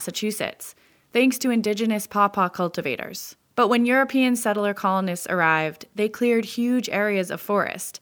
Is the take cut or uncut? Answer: cut